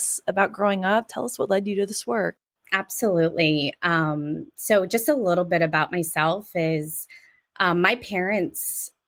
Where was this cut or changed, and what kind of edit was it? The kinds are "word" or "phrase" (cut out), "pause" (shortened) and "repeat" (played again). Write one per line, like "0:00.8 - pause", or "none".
none